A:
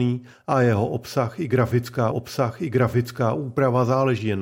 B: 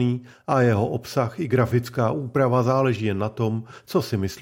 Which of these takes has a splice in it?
A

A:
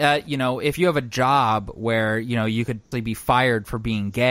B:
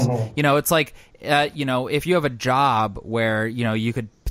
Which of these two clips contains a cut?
A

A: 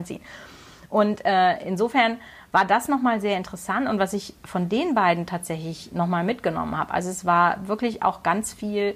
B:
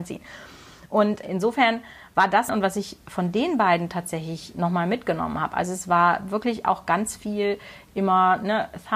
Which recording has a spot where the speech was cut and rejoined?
B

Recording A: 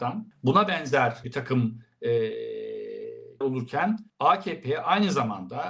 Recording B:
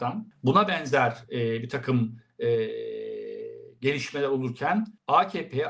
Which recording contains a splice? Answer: A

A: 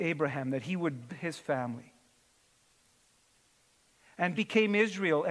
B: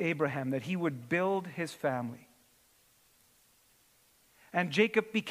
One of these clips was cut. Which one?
A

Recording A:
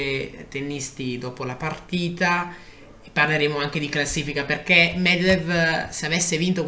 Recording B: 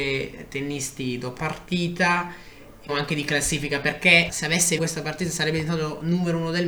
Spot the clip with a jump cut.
B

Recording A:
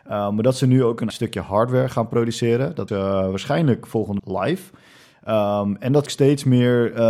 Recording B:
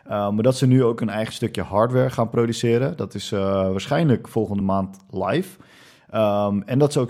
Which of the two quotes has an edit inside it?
A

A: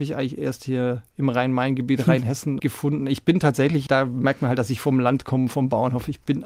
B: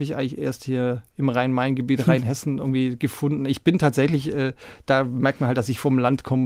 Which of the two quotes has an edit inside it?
A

